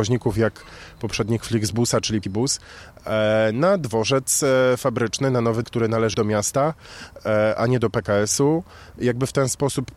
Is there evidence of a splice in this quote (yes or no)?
yes